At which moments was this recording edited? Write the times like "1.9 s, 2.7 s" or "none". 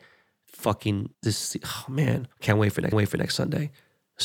1.1 s, 2.3 s, 2.9 s